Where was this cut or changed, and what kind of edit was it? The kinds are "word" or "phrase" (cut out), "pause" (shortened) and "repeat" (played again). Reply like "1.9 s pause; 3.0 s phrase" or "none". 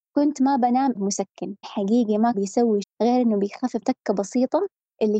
0.9 s word; 1.6 s word; 2.3 s word; 2.8 s word; 3.8 s word